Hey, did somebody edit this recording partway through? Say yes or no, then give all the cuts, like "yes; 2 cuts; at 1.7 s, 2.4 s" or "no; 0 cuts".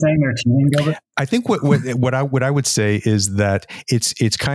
no; 0 cuts